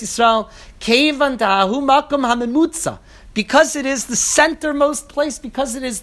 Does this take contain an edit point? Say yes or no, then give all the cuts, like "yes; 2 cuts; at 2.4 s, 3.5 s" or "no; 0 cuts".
no; 0 cuts